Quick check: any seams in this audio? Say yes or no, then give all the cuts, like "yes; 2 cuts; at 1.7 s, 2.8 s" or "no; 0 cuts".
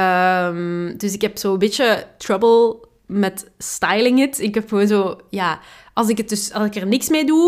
no; 0 cuts